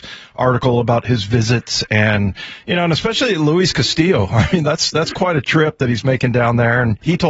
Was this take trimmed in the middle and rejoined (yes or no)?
no